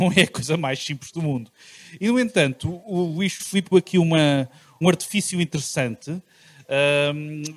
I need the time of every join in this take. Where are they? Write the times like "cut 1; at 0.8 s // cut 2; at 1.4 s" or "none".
cut 1; at 3.4 s // cut 2; at 3.7 s // cut 3; at 4.8 s